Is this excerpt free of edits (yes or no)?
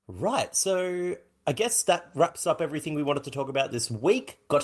yes